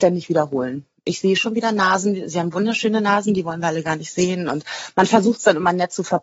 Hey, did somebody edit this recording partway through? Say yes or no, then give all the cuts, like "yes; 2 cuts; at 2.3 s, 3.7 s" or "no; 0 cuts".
no; 0 cuts